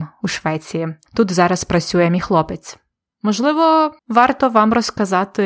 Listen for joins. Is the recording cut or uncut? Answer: cut